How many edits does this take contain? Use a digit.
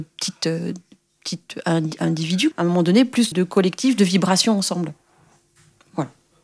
2